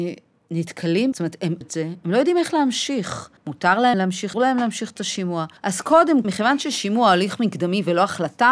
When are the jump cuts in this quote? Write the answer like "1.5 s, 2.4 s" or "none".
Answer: 1.1 s, 1.6 s, 3.4 s, 3.9 s, 4.3 s, 5.6 s, 6.2 s